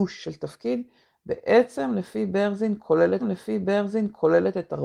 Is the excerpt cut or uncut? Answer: cut